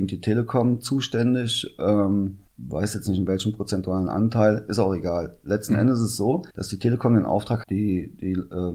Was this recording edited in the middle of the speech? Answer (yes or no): yes